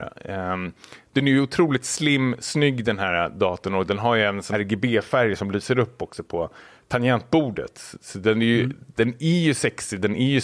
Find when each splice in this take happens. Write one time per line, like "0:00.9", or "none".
0:04.5